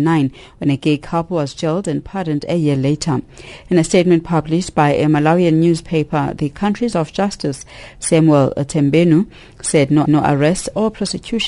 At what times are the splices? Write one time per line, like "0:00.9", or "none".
0:06.9
0:10.0